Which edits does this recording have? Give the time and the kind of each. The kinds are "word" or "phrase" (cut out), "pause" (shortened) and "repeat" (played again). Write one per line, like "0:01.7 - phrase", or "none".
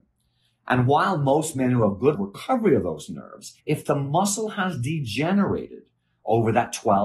0:02.1 - phrase
0:03.6 - pause